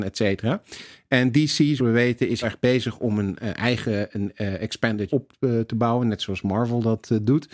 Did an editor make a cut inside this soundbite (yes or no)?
yes